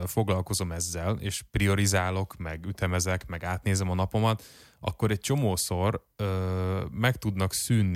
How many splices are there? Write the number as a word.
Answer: zero